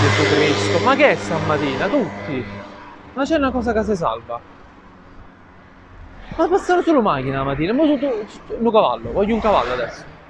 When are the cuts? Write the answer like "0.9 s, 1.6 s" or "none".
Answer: none

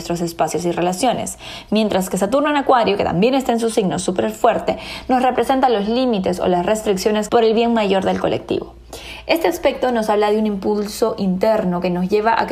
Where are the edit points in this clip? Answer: 7.3 s

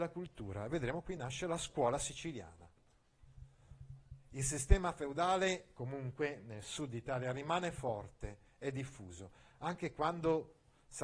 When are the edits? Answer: none

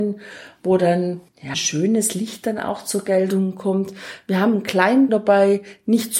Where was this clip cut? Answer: 1.5 s, 5.1 s

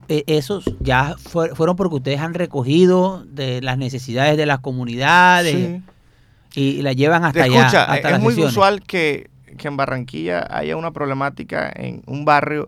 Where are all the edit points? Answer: none

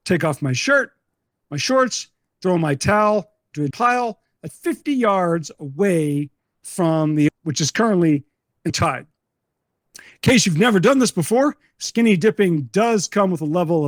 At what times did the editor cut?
3.7 s, 4.5 s, 7.3 s, 8.7 s

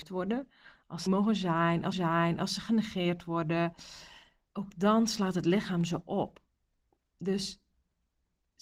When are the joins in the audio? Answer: 1.1 s, 1.9 s

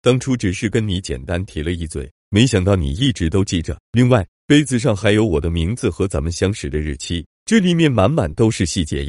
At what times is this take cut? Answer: 3.8 s

